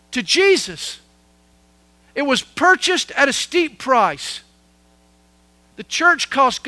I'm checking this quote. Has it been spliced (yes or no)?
no